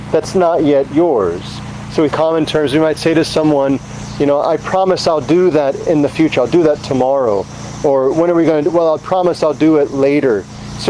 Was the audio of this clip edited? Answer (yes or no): yes